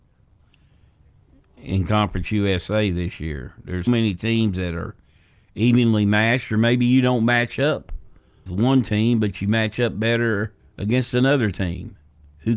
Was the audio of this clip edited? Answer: yes; 3 cuts; at 3.9 s, 8.5 s, 10.6 s

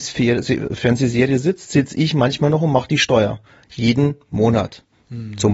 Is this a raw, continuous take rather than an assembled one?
yes; 0 cuts

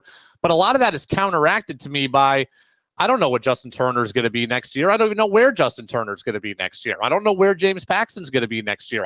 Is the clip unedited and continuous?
yes; 0 cuts

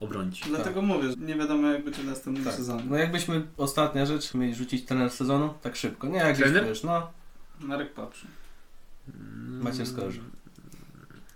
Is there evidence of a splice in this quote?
yes; 2 cuts; at 1.1 s, 4.3 s

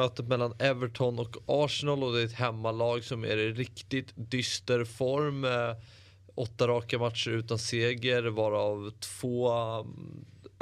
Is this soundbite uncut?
yes; 0 cuts

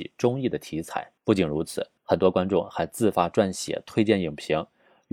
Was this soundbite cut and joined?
yes; 2 cuts; at 1.2 s, 2.0 s

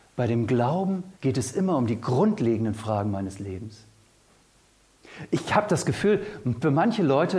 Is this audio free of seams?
no; 1 cut; at 1.2 s

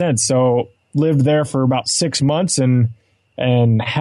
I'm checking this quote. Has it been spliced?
no; 0 cuts

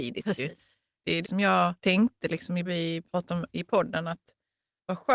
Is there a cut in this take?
yes; 3 cuts; at 1.2 s, 1.8 s, 2.6 s

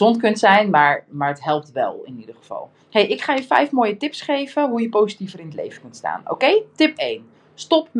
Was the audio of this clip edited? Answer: yes; 1 cut; at 2.8 s

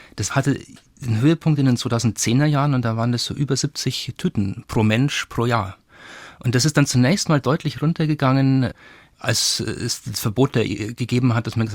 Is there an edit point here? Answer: no; 0 cuts

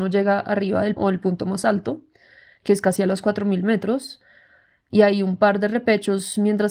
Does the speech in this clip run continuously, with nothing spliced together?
no; 1 cut; at 1.0 s

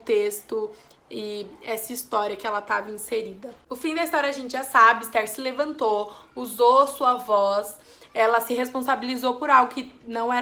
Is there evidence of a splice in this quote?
no; 0 cuts

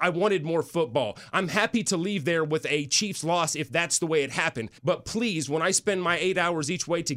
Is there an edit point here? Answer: yes; 1 cut; at 4.8 s

